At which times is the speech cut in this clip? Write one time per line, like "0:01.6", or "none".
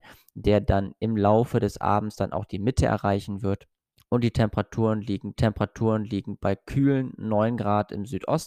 0:03.9
0:05.4